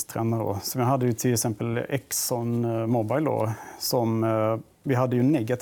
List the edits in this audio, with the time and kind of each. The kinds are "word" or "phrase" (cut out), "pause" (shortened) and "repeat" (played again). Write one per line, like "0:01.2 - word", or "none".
none